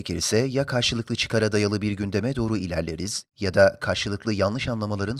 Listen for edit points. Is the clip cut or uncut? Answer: uncut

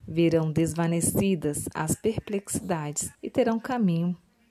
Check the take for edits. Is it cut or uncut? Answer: cut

